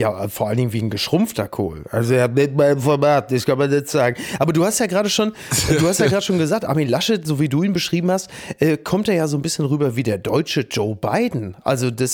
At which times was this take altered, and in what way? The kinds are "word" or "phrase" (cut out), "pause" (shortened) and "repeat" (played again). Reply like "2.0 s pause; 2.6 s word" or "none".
none